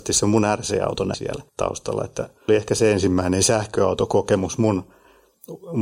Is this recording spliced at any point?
yes; 3 cuts; at 1.1 s, 1.5 s, 2.5 s

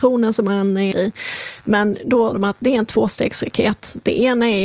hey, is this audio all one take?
no; 2 cuts; at 0.9 s, 2.3 s

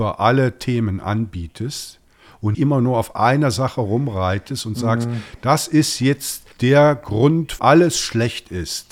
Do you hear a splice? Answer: yes; 3 cuts; at 2.5 s, 6.5 s, 7.6 s

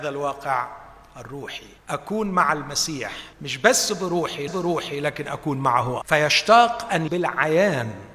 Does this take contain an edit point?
yes; 5 cuts; at 1.8 s, 3.3 s, 4.5 s, 6.0 s, 7.1 s

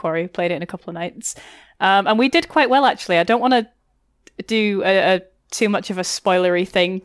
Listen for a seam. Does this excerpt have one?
no; 0 cuts

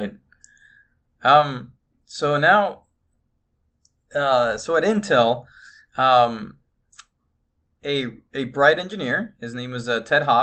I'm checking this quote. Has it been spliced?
no; 0 cuts

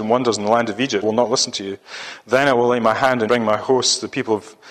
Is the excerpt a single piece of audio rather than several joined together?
no; 2 cuts; at 1.0 s, 3.3 s

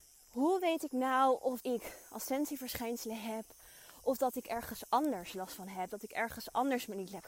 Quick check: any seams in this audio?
yes; 1 cut; at 1.6 s

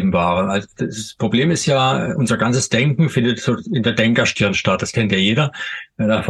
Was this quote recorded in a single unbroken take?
yes; 0 cuts

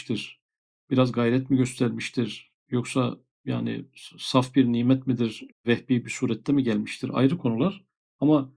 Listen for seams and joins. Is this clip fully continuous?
yes; 0 cuts

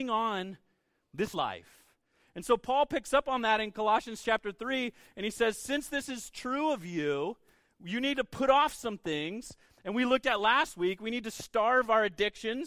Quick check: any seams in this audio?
yes; 1 cut; at 1.3 s

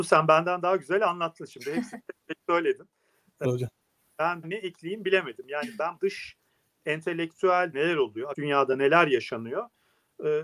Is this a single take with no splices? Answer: no; 5 cuts; at 3.4 s, 4.4 s, 6.0 s, 7.7 s, 8.3 s

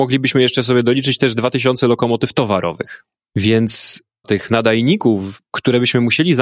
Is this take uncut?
no; 1 cut; at 4.2 s

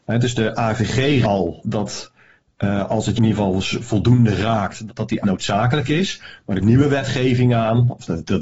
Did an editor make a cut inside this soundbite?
yes; 6 cuts; at 1.2 s, 1.6 s, 3.2 s, 4.9 s, 5.2 s, 6.6 s

